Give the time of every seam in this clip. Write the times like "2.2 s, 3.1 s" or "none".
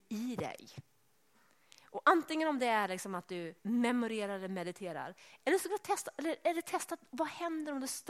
3.6 s, 7.1 s